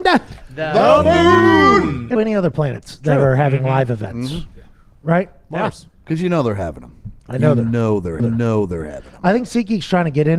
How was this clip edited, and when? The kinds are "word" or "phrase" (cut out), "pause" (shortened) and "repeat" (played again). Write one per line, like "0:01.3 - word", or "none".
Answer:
0:02.2 - word
0:07.2 - pause
0:08.2 - repeat

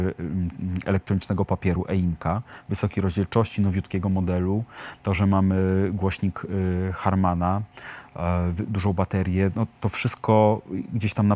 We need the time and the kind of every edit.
0:08.7 - word

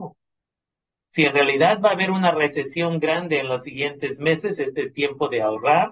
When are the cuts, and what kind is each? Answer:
none

